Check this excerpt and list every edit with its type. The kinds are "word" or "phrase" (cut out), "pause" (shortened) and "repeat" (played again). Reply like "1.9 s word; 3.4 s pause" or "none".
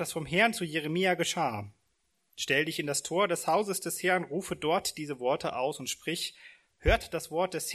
none